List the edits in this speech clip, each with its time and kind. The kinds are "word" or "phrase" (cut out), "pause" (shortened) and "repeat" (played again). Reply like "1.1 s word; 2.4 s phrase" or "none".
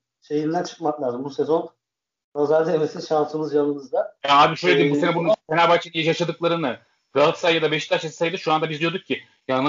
none